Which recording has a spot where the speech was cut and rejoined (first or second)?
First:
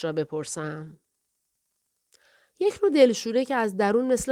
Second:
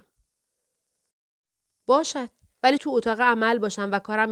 second